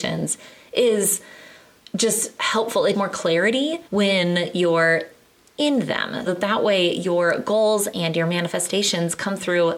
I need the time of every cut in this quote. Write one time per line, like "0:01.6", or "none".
0:02.4
0:02.9
0:03.9
0:06.3